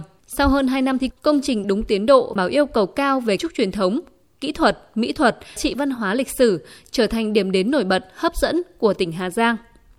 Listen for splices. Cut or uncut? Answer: cut